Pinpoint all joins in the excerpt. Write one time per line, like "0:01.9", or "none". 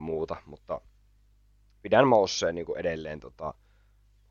none